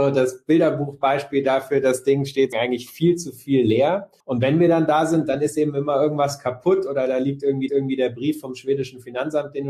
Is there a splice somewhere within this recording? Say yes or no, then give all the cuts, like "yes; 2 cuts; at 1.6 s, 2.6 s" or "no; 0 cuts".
yes; 3 cuts; at 2.5 s, 4.2 s, 7.7 s